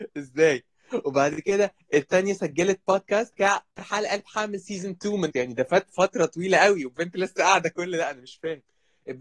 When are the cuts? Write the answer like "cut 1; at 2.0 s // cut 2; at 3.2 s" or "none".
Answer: cut 1; at 3.3 s // cut 2; at 3.7 s // cut 3; at 5.3 s